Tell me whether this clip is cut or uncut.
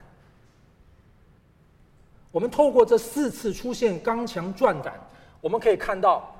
uncut